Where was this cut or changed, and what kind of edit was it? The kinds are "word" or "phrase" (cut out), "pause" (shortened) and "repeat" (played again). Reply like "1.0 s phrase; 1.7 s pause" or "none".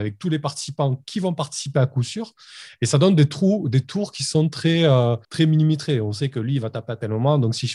5.2 s pause